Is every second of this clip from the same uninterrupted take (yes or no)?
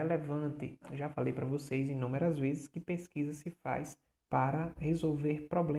no